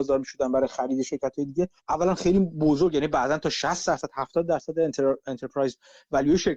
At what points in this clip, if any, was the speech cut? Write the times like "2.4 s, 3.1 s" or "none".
1.8 s